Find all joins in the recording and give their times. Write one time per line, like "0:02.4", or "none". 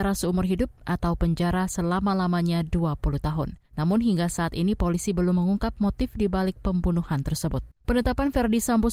0:03.6
0:07.8

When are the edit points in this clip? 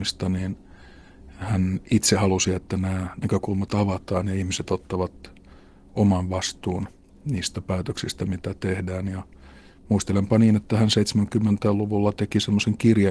none

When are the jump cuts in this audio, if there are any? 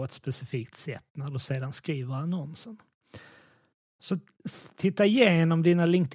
none

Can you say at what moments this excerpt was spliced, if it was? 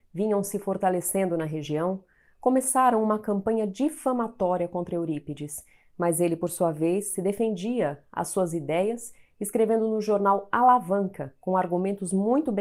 none

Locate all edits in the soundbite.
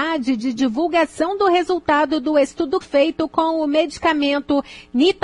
0:02.8

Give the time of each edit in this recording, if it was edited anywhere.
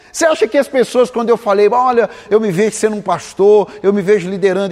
0:02.3

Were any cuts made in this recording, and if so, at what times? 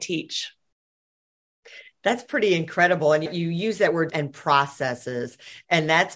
0:04.1

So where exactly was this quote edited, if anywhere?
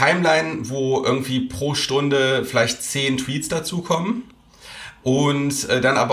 none

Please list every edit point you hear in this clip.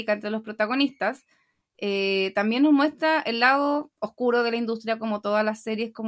none

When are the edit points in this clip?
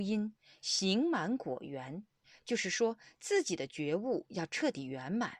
0:02.2

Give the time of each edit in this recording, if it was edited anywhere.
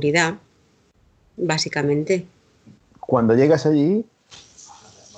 none

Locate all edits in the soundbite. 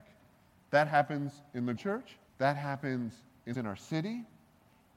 0:01.8
0:02.3
0:03.5

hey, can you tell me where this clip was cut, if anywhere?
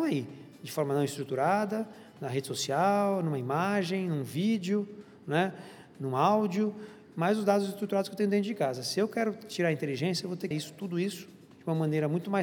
0:10.5

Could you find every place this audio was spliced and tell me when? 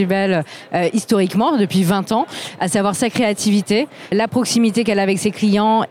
0:04.1

